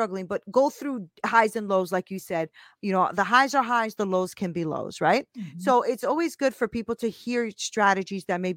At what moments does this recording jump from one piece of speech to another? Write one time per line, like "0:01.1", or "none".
none